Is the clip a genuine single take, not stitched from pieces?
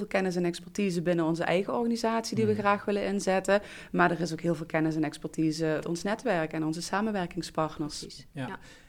no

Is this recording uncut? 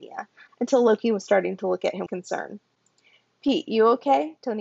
no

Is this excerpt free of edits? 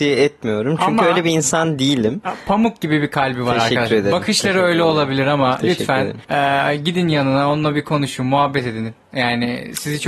no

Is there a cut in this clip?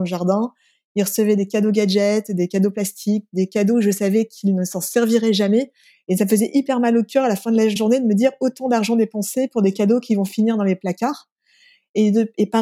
yes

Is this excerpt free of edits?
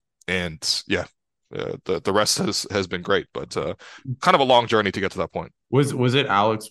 yes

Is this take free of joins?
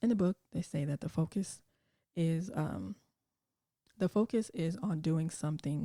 yes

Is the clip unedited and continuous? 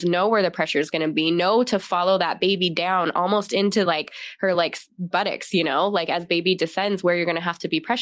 yes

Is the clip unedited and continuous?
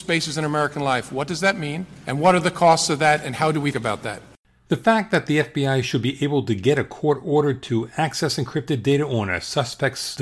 no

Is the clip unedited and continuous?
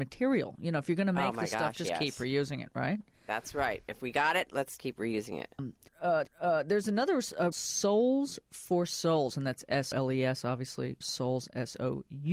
no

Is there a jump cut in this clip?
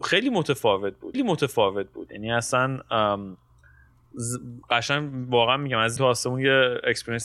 yes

